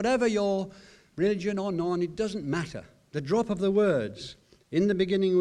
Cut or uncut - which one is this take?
uncut